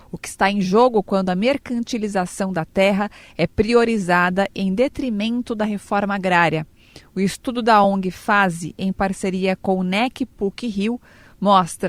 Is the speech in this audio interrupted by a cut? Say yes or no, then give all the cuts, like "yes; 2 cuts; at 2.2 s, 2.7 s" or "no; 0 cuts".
no; 0 cuts